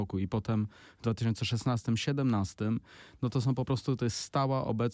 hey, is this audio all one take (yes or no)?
yes